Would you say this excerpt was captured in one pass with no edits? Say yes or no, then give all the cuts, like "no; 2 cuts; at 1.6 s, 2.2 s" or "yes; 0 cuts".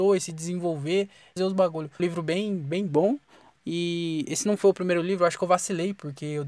no; 2 cuts; at 1.4 s, 2.0 s